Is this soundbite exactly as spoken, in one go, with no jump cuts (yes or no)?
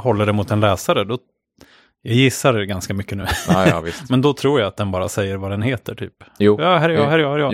yes